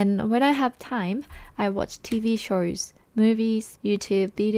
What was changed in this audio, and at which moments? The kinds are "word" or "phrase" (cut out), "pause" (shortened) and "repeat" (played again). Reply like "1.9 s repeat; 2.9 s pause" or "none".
none